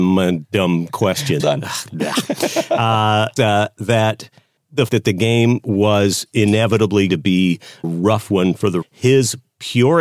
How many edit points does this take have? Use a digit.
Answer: 7